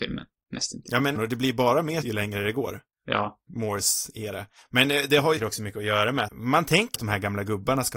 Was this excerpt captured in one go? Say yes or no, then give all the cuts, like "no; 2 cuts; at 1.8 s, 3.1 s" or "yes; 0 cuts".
no; 6 cuts; at 1.1 s, 2.0 s, 3.5 s, 5.4 s, 6.3 s, 6.9 s